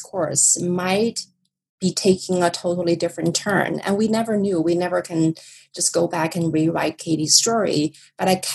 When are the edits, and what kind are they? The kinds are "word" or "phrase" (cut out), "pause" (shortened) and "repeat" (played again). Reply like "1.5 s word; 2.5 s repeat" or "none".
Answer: none